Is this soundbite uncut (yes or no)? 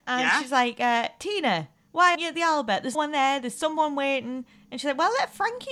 no